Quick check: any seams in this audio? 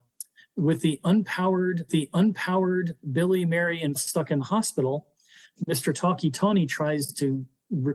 yes; 2 cuts; at 1.9 s, 3.9 s

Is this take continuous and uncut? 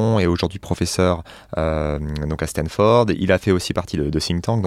yes; 0 cuts

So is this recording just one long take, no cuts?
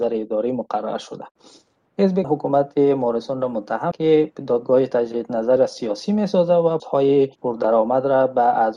no; 5 cuts; at 2.2 s, 3.9 s, 5.6 s, 6.8 s, 7.4 s

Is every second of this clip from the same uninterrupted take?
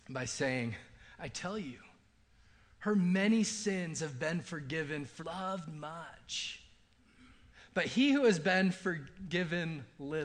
no; 1 cut; at 5.2 s

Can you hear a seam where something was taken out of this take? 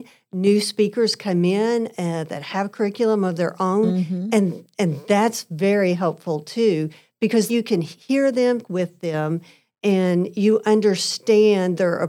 yes; 2 cuts; at 7.5 s, 8.6 s

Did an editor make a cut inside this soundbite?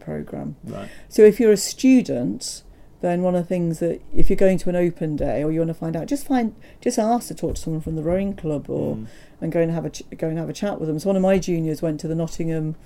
no; 0 cuts

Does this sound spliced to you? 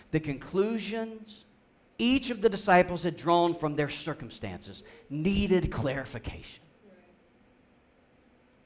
no; 0 cuts

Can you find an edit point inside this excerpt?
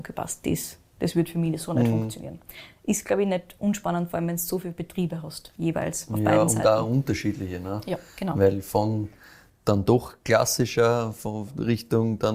no; 0 cuts

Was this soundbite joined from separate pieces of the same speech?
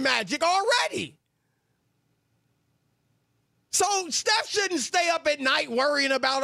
no; 0 cuts

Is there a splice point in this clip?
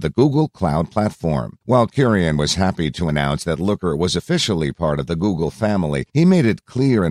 yes; 2 cuts; at 1.6 s, 6.1 s

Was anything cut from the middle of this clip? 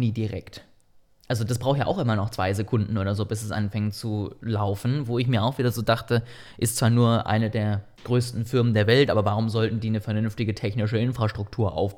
yes; 1 cut; at 7.9 s

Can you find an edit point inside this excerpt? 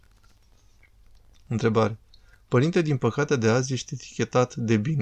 yes; 1 cut; at 3.3 s

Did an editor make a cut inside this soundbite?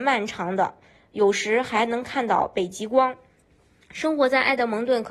no; 0 cuts

